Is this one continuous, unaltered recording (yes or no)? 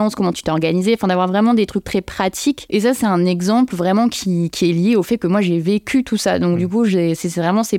yes